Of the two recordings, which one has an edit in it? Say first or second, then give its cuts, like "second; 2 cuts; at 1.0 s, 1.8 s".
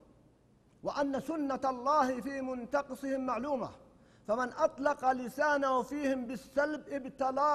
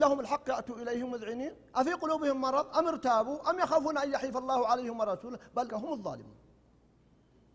second; 1 cut; at 5.7 s